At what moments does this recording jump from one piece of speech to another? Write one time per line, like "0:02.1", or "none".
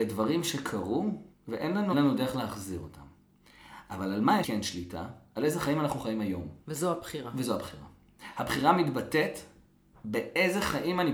0:01.3
0:01.9
0:04.4
0:06.6